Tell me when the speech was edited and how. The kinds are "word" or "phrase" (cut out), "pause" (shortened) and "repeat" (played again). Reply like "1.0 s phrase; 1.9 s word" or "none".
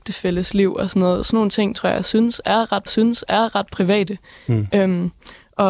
2.9 s repeat

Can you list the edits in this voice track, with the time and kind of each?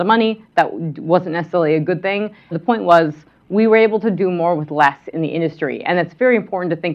2.5 s word

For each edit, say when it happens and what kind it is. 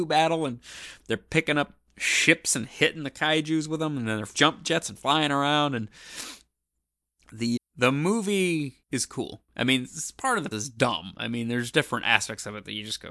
4.3 s phrase; 7.6 s word; 8.8 s pause; 9.5 s pause; 10.5 s word

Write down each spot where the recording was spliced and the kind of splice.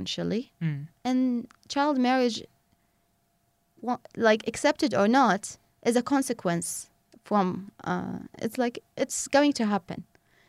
none

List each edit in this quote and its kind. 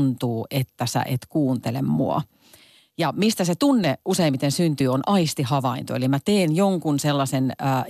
none

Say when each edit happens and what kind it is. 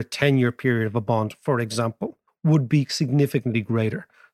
2.3 s pause

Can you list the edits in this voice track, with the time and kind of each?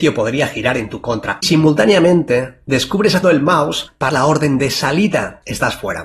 1.4 s word; 3.2 s phrase; 4.1 s word

